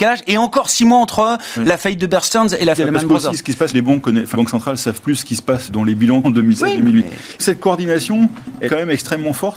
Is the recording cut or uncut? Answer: cut